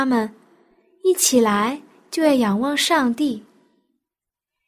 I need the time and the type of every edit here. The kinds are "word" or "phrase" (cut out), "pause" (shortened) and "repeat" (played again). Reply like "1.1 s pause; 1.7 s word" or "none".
none

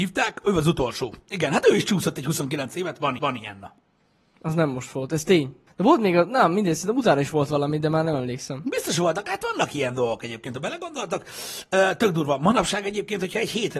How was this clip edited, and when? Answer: 3.2 s repeat; 5.7 s pause

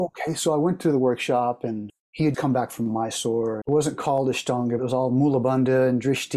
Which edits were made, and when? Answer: 1.9 s word; 2.3 s word; 3.6 s word; 4.8 s word

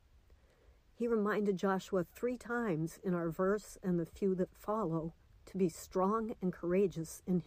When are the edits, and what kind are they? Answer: none

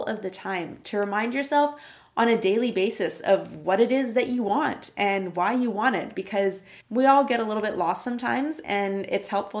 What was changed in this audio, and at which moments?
6.8 s pause

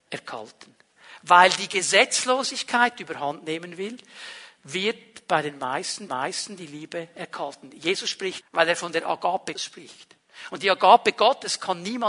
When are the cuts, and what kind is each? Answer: 6.1 s repeat; 8.4 s phrase; 9.6 s word

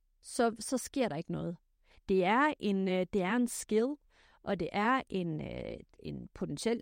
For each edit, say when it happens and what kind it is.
none

